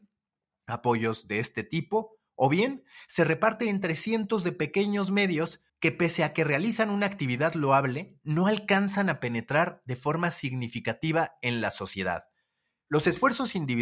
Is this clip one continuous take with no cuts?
no; 1 cut; at 5.7 s

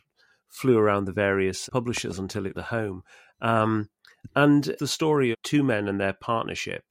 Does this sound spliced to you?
yes; 4 cuts; at 1.7 s, 2.5 s, 4.8 s, 5.3 s

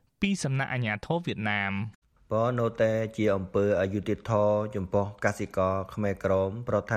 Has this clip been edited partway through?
yes; 1 cut; at 2.0 s

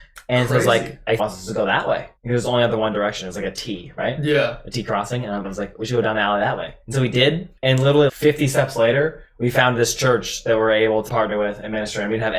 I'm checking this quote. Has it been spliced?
yes; 7 cuts; at 1.2 s, 2.2 s, 5.4 s, 6.8 s, 7.6 s, 8.1 s, 11.1 s

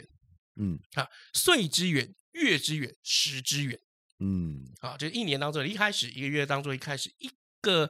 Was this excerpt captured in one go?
yes; 0 cuts

